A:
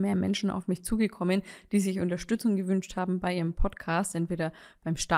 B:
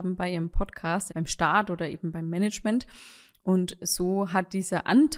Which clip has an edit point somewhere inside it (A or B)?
B